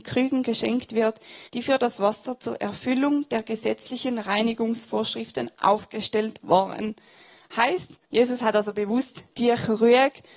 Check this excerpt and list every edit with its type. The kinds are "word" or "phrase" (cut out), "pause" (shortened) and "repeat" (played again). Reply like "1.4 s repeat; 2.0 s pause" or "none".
1.5 s pause; 8.1 s pause; 9.3 s pause

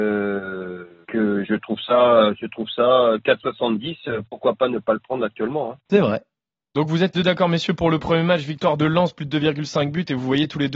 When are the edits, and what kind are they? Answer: 1.0 s word; 1.4 s word; 7.1 s word

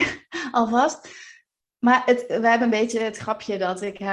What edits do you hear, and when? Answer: none

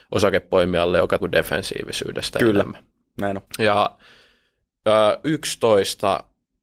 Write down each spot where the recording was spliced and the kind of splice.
1.2 s phrase; 3.5 s pause; 5.2 s word

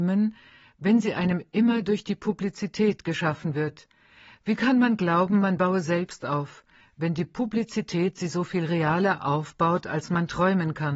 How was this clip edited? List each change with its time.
none

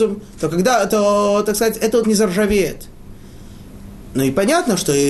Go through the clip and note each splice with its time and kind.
2.0 s word

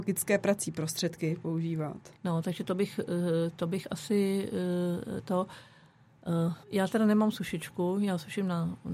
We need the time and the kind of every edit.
2.2 s pause; 6.6 s pause

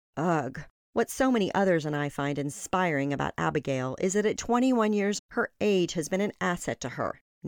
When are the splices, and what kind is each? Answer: 4.4 s word; 5.2 s word

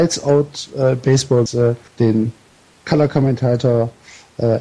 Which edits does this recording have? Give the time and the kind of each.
1.5 s phrase; 1.9 s pause

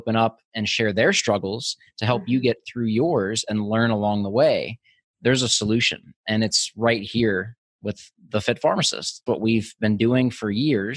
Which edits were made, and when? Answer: 9.3 s word

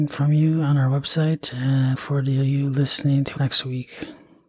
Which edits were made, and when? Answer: 1.9 s word; 3.4 s word

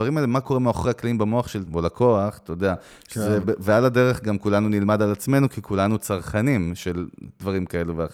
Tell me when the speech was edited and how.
1.7 s word; 3.4 s word

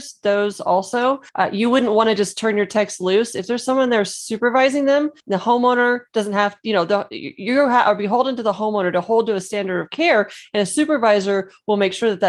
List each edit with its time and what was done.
1.3 s pause; 5.2 s pause

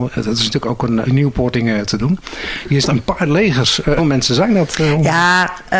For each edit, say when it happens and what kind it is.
1.1 s phrase; 1.5 s phrase; 2.8 s word; 4.0 s word

